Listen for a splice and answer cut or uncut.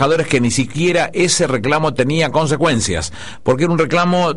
uncut